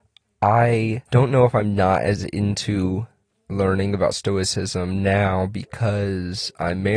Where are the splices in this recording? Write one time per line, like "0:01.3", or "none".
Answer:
0:01.1
0:03.2